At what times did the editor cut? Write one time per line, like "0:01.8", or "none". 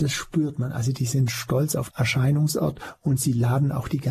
0:01.9